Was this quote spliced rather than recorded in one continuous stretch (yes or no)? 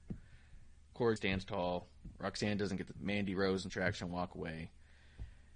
yes